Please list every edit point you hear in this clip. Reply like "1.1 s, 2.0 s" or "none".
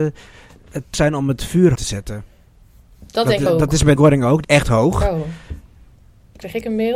0.9 s, 1.7 s, 3.5 s, 4.0 s, 4.4 s

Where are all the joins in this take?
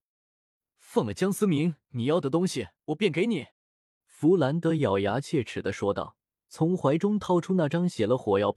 1.8 s, 2.8 s, 3.5 s, 6.2 s

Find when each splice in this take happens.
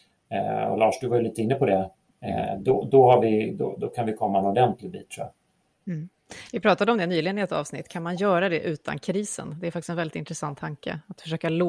none

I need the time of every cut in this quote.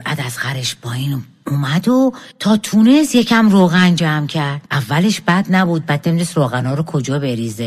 2.3 s, 4.7 s

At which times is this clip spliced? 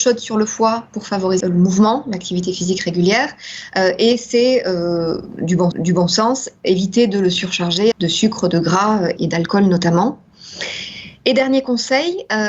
1.4 s, 5.7 s, 7.9 s, 9.2 s

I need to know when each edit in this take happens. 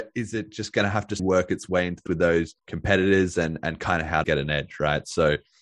1.2 s, 2.1 s, 2.6 s, 4.2 s

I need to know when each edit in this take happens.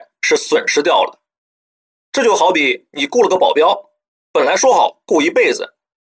none

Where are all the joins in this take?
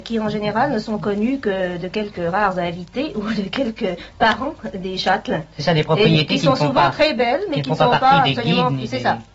none

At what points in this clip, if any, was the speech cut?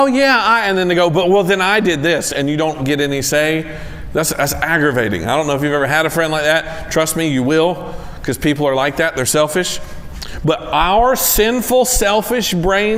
none

